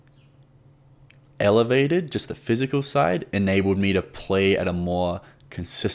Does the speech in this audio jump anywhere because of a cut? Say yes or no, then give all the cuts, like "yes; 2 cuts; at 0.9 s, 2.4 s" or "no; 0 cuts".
no; 0 cuts